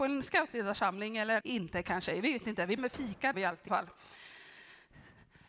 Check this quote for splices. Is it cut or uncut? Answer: cut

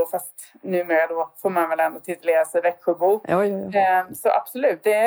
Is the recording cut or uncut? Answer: uncut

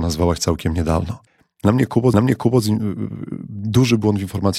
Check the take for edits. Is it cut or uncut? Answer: cut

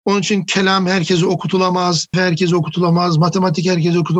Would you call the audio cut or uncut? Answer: cut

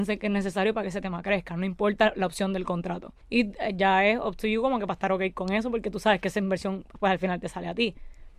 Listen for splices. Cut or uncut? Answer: cut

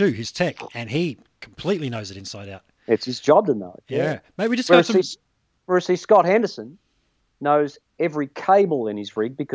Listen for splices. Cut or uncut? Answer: uncut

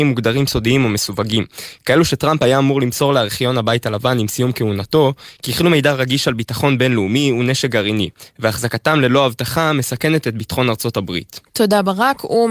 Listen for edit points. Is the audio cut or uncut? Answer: uncut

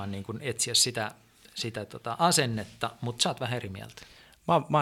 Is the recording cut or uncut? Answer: uncut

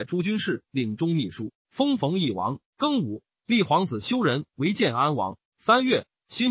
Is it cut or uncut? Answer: cut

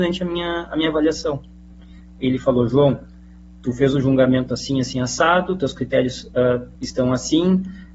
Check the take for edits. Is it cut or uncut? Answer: cut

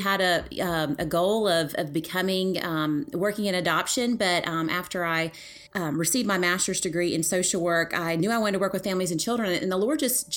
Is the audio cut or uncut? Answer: cut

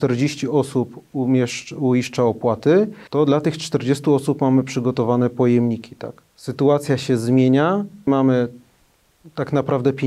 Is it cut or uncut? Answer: cut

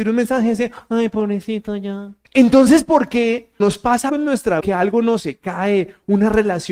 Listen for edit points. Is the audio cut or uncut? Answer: cut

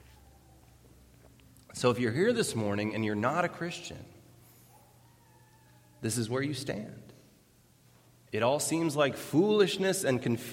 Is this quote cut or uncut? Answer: uncut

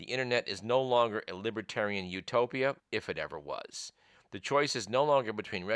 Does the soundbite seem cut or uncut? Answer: cut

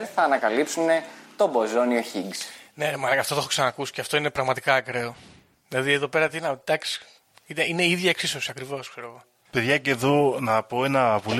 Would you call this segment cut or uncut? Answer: uncut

